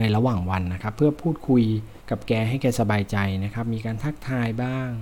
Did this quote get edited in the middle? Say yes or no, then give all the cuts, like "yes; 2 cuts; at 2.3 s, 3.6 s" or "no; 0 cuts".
yes; 1 cut; at 2.0 s